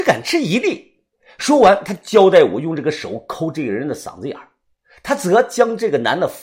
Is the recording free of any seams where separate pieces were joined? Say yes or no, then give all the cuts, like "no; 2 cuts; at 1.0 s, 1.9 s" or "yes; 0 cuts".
yes; 0 cuts